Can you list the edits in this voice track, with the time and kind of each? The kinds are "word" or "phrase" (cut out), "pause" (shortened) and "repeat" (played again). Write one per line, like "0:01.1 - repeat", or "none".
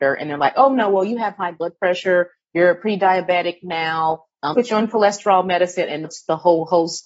0:04.5 - word
0:06.0 - word